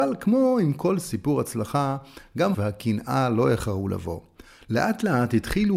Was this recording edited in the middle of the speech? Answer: yes; 1 cut; at 2.5 s

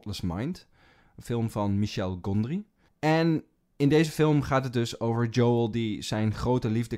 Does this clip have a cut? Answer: no; 0 cuts

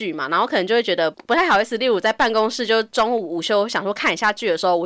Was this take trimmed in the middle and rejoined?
no; 0 cuts

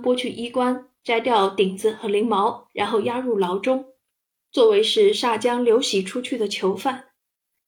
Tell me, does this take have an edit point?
no; 0 cuts

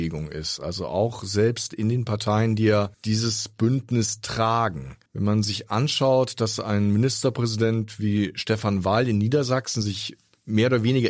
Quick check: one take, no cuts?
no; 2 cuts; at 2.9 s, 5.1 s

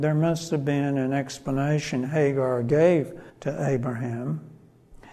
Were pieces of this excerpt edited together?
yes; 1 cut; at 3.3 s

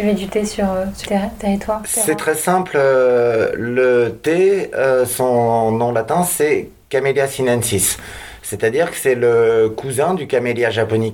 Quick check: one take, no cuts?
no; 1 cut; at 1.1 s

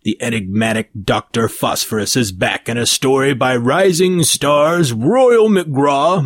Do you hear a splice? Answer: no; 0 cuts

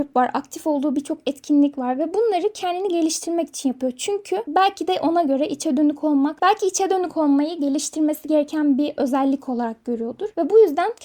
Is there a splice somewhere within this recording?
no; 0 cuts

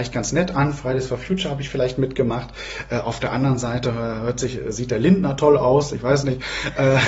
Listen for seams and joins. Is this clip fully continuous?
yes; 0 cuts

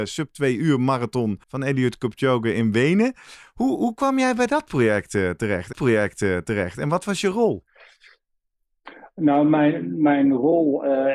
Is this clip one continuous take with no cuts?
no; 2 cuts; at 1.4 s, 5.7 s

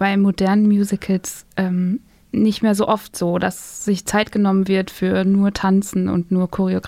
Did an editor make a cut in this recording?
no; 0 cuts

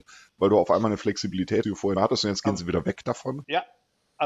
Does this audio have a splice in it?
yes; 2 cuts; at 1.6 s, 2.0 s

